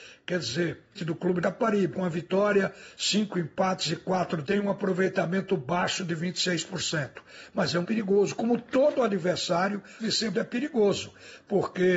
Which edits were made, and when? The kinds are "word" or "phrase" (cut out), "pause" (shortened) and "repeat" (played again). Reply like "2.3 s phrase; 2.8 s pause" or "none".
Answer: 1.0 s word; 1.4 s word; 1.9 s word; 4.4 s word; 7.8 s word; 10.0 s word; 10.3 s word

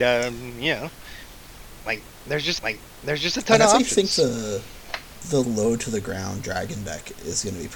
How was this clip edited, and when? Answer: 2.6 s repeat; 5.4 s word

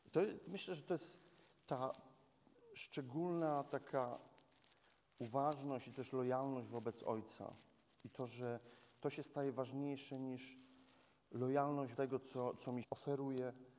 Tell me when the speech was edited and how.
11.9 s word; 12.8 s word

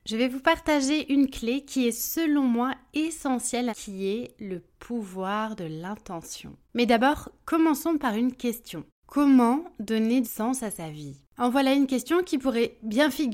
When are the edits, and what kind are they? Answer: 3.7 s phrase; 6.6 s pause; 8.9 s pause; 10.2 s word; 11.3 s pause

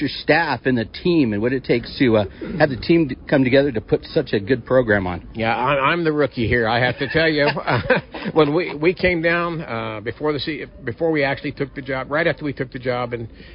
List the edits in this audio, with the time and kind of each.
none

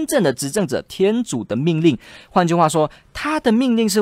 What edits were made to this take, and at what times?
none

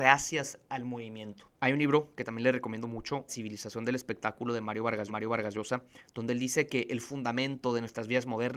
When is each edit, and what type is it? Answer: 1.5 s pause; 3.3 s word; 5.1 s repeat

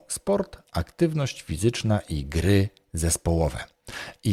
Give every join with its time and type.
none

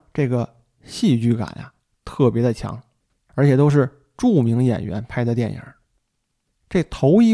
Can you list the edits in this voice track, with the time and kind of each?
none

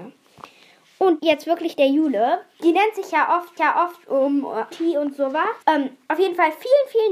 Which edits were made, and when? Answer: 1.2 s word; 3.6 s repeat; 4.7 s phrase; 5.6 s pause

